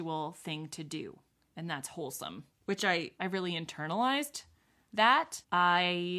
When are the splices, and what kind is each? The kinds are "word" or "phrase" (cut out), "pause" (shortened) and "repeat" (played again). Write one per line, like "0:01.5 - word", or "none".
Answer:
none